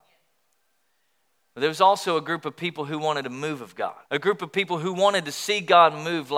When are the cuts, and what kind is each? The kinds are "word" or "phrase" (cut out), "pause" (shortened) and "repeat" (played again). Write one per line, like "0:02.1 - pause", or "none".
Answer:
0:04.1 - pause